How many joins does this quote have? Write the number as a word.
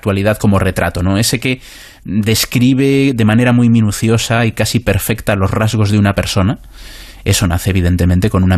zero